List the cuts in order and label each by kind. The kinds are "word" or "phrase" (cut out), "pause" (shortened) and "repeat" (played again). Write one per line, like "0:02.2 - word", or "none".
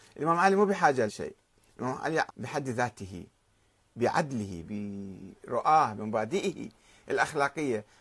0:01.1 - word
0:02.3 - word
0:04.6 - word
0:06.0 - word